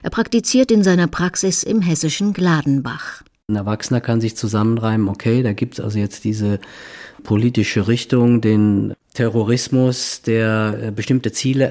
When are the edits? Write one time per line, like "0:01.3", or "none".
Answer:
none